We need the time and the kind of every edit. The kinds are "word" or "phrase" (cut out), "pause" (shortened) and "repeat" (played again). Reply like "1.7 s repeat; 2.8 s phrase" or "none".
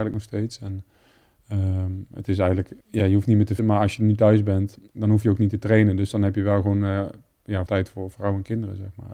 2.8 s pause; 3.6 s word; 4.9 s pause; 7.7 s word; 8.1 s word